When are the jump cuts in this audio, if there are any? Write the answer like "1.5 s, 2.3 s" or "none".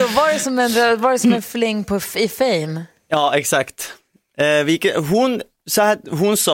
none